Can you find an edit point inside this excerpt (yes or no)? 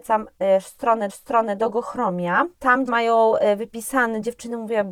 yes